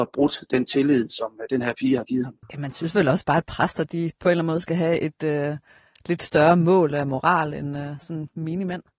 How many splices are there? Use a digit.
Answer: 1